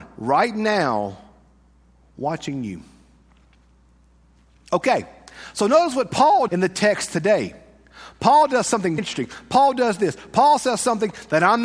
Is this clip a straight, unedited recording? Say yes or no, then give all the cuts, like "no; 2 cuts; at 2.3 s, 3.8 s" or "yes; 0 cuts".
no; 2 cuts; at 6.5 s, 9.0 s